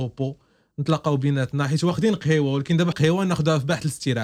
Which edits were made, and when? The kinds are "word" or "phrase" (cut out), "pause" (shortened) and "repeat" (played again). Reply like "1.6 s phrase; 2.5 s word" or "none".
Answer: 2.9 s word

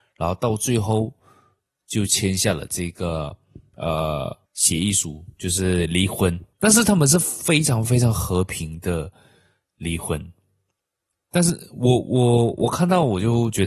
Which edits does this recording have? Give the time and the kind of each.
4.5 s pause; 6.5 s pause

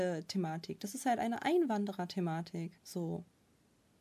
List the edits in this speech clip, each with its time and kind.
2.8 s pause

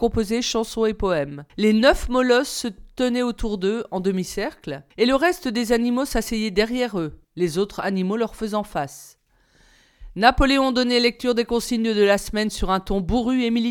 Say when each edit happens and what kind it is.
1.5 s pause; 4.9 s pause; 7.2 s pause

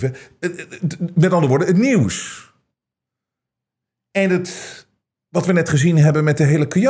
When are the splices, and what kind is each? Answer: none

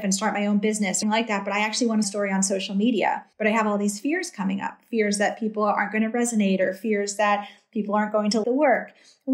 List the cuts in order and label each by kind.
1.0 s phrase; 2.0 s phrase; 3.3 s pause; 8.4 s word

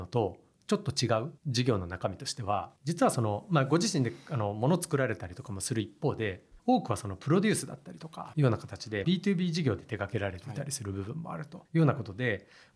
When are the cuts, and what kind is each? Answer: 1.4 s pause; 2.8 s pause; 6.6 s pause; 8.3 s word; 9.0 s phrase; 11.7 s pause

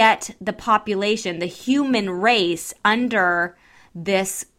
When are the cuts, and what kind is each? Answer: none

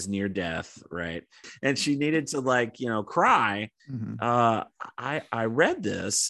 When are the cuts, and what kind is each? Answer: 3.8 s pause

